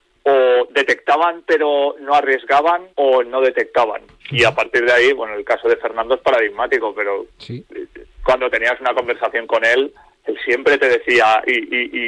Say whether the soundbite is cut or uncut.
cut